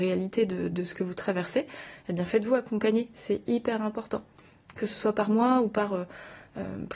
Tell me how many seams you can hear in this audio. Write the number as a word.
zero